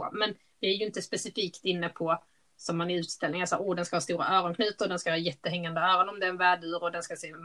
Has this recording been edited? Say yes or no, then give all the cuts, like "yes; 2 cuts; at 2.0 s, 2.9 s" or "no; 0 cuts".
no; 0 cuts